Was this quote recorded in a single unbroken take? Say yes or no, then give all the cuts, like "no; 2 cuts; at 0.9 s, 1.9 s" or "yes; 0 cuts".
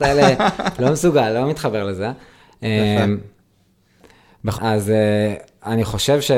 no; 1 cut; at 4.6 s